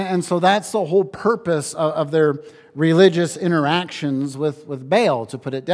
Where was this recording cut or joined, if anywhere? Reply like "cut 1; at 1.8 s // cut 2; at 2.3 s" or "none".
none